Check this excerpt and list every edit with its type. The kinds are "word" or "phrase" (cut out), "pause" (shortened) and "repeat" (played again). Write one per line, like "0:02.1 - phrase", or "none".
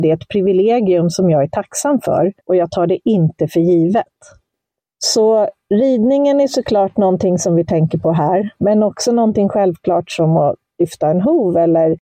0:02.4 - pause